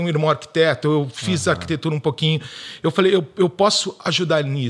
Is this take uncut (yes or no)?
yes